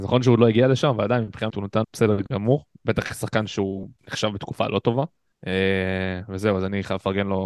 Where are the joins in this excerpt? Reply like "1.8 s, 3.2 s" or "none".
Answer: 1.5 s, 1.8 s, 4.0 s, 5.3 s